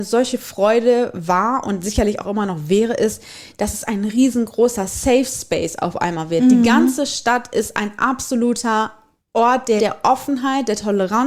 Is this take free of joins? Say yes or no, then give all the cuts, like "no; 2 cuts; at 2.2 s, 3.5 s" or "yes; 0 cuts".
no; 1 cut; at 9.8 s